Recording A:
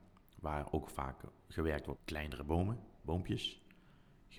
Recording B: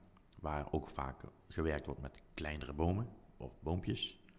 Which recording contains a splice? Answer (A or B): A